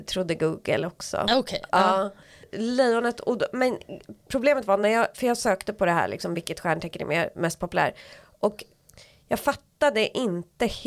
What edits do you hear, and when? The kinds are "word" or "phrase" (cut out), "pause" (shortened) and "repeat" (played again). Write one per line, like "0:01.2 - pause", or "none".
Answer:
none